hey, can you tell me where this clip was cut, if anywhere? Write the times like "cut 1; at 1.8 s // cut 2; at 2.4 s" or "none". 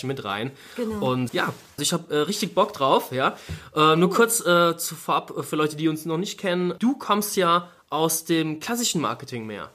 cut 1; at 1.3 s // cut 2; at 1.8 s